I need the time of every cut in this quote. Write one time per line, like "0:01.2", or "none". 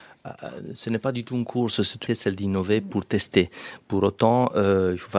0:02.1